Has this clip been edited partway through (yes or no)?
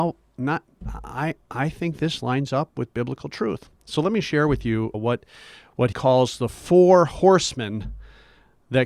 yes